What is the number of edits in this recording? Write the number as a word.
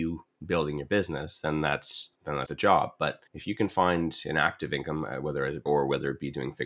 four